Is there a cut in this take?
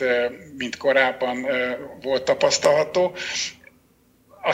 no; 0 cuts

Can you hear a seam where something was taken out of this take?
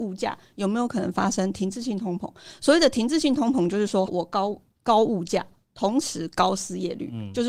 yes; 1 cut; at 4.1 s

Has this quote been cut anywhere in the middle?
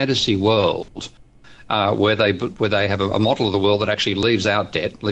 no; 0 cuts

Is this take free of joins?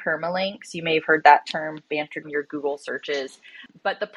no; 1 cut; at 2.2 s

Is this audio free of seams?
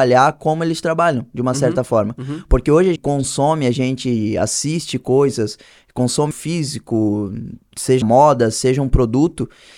no; 3 cuts; at 3.0 s, 6.3 s, 8.0 s

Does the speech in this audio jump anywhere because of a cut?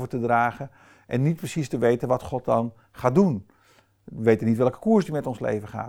no; 0 cuts

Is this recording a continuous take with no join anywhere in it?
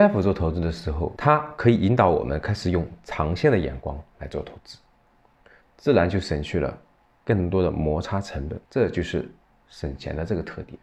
no; 1 cut; at 8.6 s

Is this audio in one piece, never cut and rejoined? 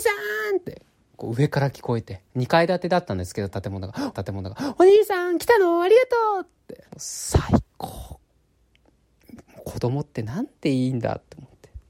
no; 3 cuts; at 2.3 s, 4.1 s, 6.9 s

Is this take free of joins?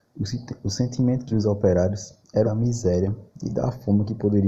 no; 2 cuts; at 1.3 s, 2.4 s

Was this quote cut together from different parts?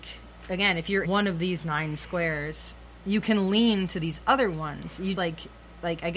yes; 2 cuts; at 1.0 s, 5.2 s

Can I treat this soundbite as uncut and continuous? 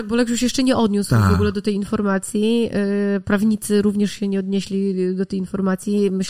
yes; 0 cuts

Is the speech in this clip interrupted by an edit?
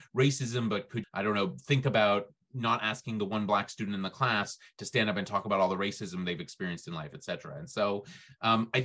yes; 1 cut; at 1.0 s

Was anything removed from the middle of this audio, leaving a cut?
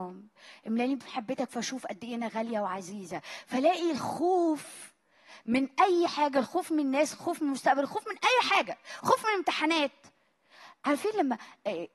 no; 0 cuts

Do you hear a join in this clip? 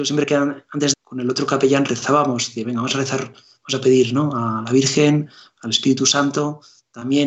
yes; 1 cut; at 0.9 s

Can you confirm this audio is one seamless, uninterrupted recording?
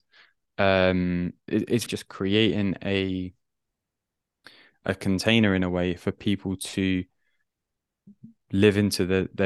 no; 2 cuts; at 1.5 s, 1.9 s

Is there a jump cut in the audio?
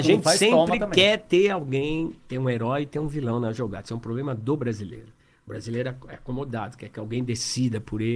no; 0 cuts

